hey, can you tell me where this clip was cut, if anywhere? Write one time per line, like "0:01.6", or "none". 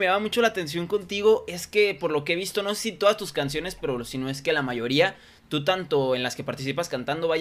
none